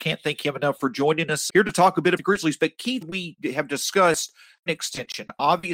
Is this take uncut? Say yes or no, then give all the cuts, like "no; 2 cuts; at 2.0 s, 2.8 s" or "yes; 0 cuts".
no; 4 cuts; at 1.5 s, 2.2 s, 3.0 s, 4.7 s